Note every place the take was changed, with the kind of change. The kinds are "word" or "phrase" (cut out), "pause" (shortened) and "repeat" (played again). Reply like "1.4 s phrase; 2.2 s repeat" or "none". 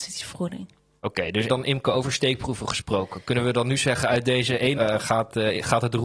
1.5 s word; 4.7 s word

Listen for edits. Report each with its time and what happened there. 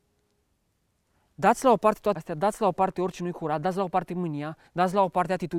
2.2 s word; 4.7 s pause

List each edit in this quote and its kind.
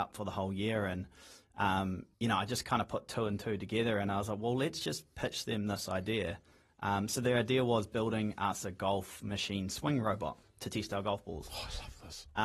2.1 s pause

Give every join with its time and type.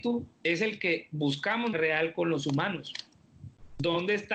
1.7 s phrase

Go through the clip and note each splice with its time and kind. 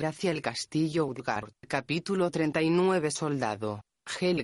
1.6 s pause

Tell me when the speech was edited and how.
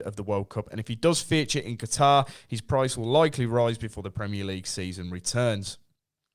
none

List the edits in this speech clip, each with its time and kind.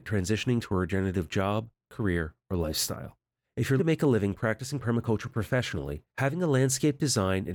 3.4 s pause; 3.8 s word; 6.1 s pause

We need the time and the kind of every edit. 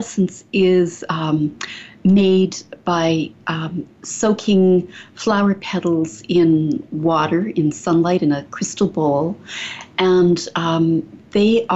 3.9 s pause

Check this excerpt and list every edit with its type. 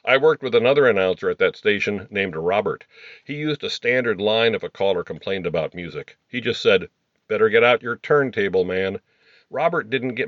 none

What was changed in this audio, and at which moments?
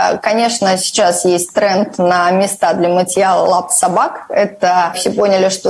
none

